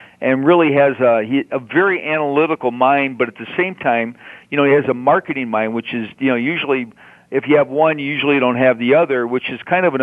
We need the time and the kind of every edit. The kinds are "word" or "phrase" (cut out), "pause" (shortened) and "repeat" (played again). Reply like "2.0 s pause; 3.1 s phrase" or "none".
none